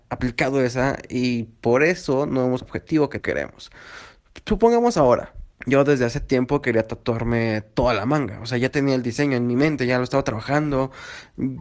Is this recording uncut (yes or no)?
no